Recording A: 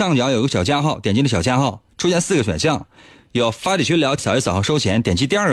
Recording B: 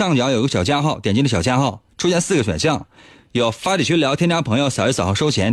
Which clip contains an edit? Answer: A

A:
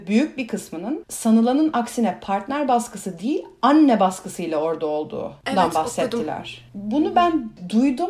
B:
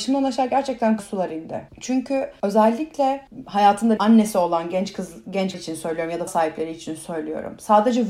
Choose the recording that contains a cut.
B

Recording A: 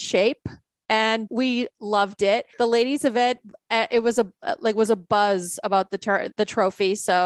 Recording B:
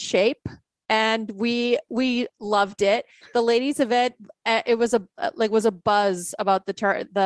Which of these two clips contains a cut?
A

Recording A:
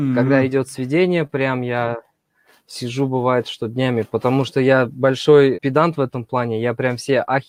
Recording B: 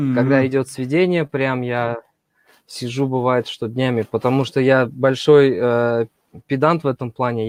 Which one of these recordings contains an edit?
A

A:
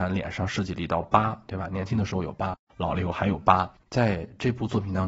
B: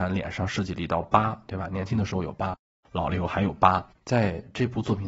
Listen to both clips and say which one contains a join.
A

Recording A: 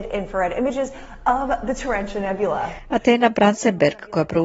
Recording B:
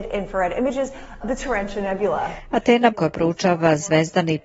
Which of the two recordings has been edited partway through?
B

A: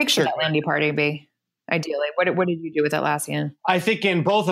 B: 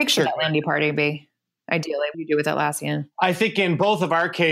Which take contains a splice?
B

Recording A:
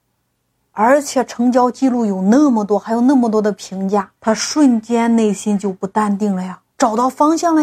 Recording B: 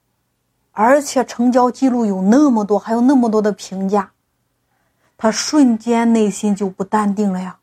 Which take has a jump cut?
A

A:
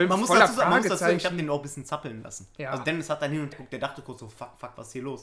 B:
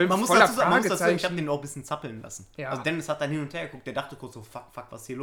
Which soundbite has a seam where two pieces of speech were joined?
A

